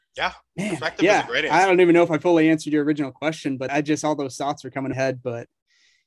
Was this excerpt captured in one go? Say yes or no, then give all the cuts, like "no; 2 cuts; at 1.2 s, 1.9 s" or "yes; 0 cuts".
no; 2 cuts; at 3.7 s, 4.9 s